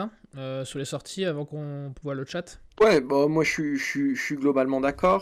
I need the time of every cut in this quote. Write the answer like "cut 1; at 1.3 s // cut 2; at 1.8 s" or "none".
cut 1; at 2.7 s